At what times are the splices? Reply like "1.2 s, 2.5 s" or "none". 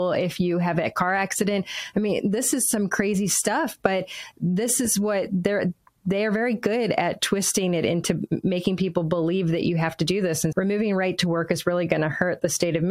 10.5 s